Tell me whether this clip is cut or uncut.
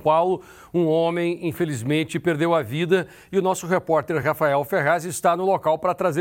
uncut